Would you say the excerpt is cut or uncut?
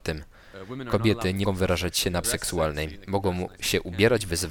cut